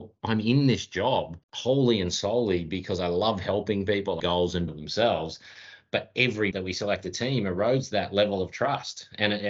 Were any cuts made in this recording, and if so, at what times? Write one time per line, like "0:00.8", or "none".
0:01.4
0:04.2
0:04.7
0:06.5